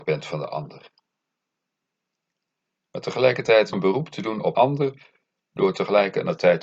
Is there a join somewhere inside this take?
yes; 2 cuts; at 3.7 s, 4.5 s

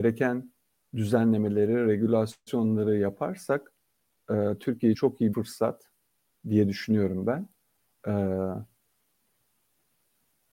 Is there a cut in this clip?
yes; 2 cuts; at 4.9 s, 5.3 s

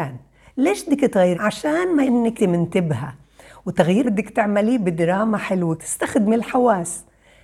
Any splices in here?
yes; 5 cuts; at 1.3 s, 2.0 s, 2.4 s, 4.0 s, 5.8 s

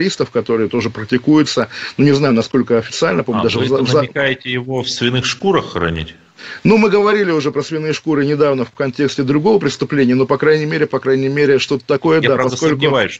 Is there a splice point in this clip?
no; 0 cuts

